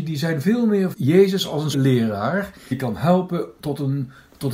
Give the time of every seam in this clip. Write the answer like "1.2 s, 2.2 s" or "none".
0.9 s, 1.7 s, 2.7 s, 3.6 s